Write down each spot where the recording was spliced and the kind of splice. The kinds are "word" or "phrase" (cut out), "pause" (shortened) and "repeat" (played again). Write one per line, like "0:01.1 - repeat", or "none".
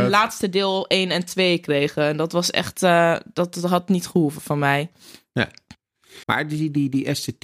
0:06.2 - pause